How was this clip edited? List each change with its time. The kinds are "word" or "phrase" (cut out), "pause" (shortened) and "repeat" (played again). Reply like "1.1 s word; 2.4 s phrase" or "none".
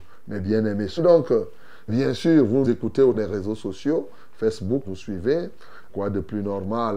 1.0 s word; 1.9 s word; 2.6 s word; 3.1 s word; 4.8 s word; 5.9 s word